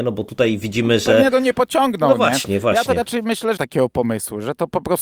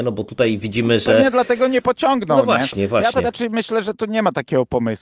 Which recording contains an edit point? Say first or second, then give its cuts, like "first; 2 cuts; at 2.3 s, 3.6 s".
first; 2 cuts; at 1.3 s, 3.6 s